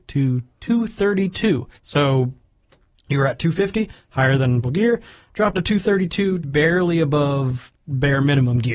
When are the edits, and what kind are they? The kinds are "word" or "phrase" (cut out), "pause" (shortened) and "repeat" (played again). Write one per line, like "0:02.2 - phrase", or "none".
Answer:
0:01.7 - pause
0:04.6 - word
0:05.5 - word
0:06.4 - word